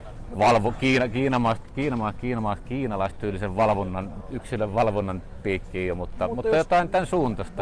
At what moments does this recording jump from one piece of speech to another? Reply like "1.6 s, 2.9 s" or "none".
none